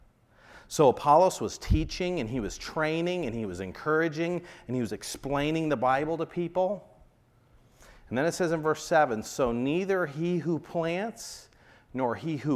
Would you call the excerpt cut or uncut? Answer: uncut